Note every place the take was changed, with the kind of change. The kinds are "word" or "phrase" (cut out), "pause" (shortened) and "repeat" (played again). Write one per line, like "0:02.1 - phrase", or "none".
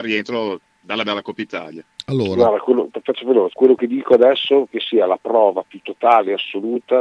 0:01.0 - word
0:02.9 - word
0:03.5 - word
0:04.7 - word